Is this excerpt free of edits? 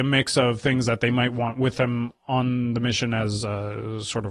yes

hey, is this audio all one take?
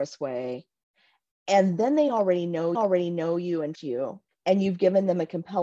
no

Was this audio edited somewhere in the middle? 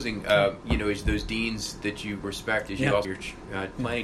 yes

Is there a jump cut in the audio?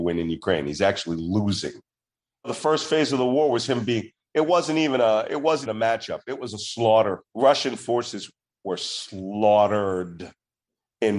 yes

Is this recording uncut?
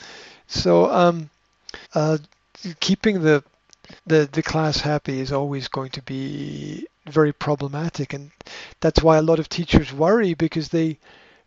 no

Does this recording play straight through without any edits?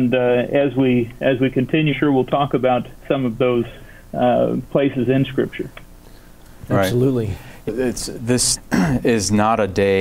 no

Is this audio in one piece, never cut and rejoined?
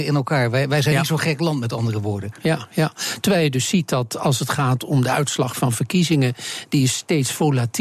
yes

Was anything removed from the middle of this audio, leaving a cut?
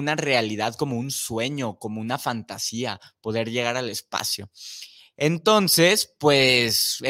no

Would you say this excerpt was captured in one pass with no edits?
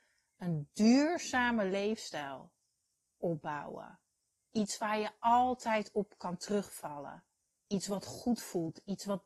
yes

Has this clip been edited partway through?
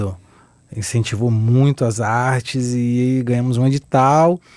no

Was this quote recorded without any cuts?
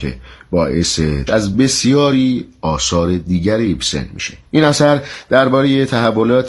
no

